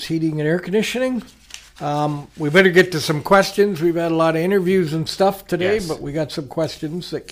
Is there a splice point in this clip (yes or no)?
yes